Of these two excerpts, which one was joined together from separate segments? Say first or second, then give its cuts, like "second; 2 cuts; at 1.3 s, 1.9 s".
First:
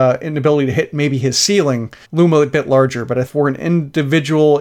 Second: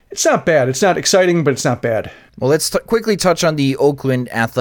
first; 2 cuts; at 2.0 s, 3.3 s